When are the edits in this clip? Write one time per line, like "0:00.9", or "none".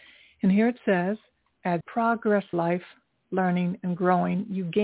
0:01.8
0:02.5